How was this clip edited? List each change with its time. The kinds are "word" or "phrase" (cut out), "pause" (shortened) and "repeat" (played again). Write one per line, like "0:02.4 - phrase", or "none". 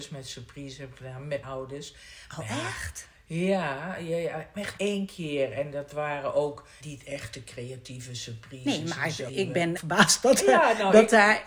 0:01.4 - word
0:04.8 - word
0:06.8 - word
0:09.3 - word
0:09.8 - phrase